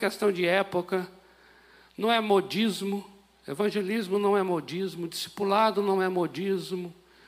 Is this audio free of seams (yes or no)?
yes